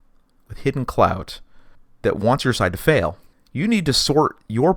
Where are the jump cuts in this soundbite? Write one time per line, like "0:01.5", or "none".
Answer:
none

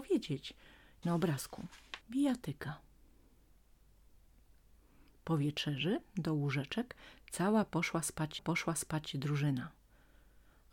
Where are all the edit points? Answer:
0:01.0
0:02.0
0:08.4

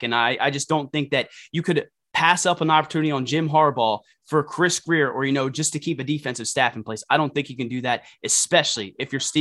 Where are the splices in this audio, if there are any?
none

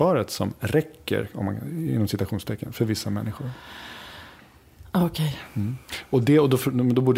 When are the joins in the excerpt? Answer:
none

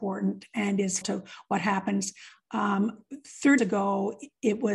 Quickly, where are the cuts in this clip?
0:01.0
0:03.6

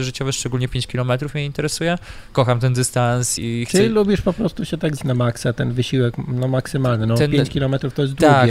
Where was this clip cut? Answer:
0:03.4
0:05.0

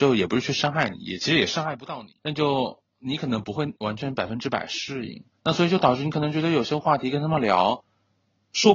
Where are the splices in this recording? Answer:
0:02.2
0:02.9
0:05.3

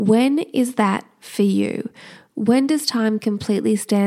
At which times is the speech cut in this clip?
none

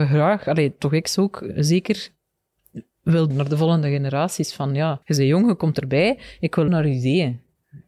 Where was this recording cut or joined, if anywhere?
0:03.3
0:05.0
0:06.7

